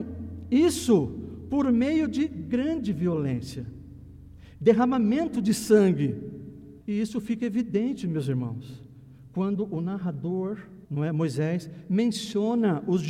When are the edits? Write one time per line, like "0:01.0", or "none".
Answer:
0:06.8
0:10.8